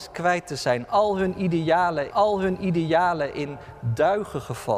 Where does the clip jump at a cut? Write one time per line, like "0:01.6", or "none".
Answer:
0:02.1